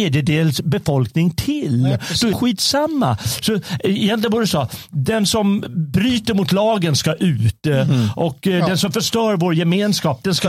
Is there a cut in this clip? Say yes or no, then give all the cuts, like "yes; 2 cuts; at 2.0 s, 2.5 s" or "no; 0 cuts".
yes; 1 cut; at 2.3 s